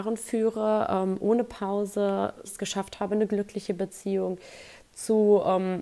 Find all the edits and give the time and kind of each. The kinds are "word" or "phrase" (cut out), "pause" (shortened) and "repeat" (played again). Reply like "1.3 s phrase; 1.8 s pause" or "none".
2.4 s word